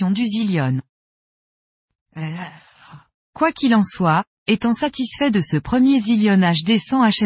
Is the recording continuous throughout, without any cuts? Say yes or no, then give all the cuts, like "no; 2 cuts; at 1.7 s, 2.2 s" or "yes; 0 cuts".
yes; 0 cuts